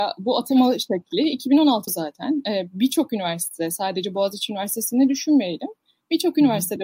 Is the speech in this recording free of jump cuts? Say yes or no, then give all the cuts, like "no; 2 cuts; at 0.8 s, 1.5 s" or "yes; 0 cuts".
no; 1 cut; at 1.9 s